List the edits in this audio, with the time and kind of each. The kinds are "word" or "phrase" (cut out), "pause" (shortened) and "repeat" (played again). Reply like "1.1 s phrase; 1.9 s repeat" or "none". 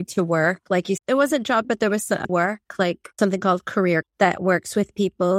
1.0 s word; 1.6 s word; 2.3 s word; 3.2 s word; 4.0 s word